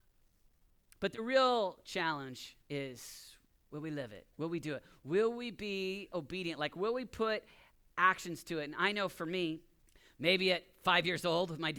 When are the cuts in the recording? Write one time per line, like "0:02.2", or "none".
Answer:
0:02.6
0:04.3
0:09.8

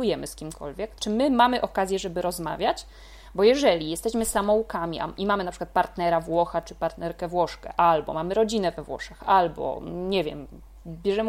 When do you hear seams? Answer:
0:01.0

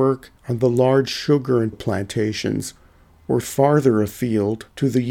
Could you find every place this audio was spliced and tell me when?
0:01.7
0:03.4

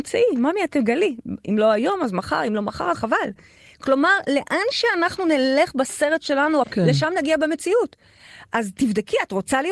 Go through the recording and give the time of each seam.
0:02.9
0:06.6

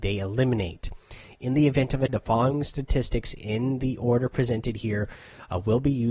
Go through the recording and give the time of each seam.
0:02.1

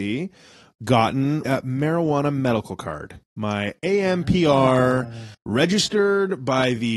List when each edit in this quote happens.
0:01.5
0:03.2
0:05.3

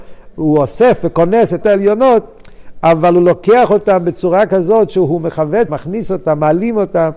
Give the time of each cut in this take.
0:01.6
0:05.7

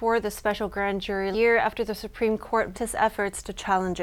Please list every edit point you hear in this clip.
0:01.3
0:02.7

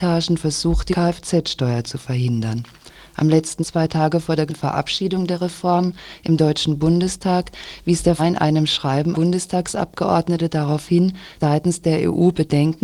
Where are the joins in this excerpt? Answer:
0:00.9
0:03.6
0:04.5
0:08.2
0:09.1
0:11.4

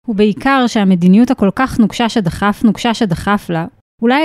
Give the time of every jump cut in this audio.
0:02.6

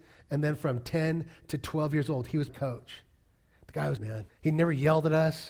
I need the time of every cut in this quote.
0:02.5
0:04.0
0:04.3

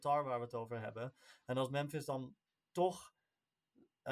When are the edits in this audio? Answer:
none

